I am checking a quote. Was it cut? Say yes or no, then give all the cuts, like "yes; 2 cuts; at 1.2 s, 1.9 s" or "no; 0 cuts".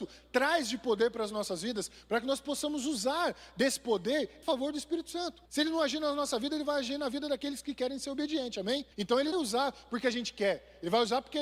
yes; 4 cuts; at 4.4 s, 5.5 s, 8.9 s, 9.3 s